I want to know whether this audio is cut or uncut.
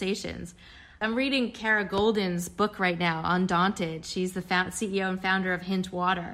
uncut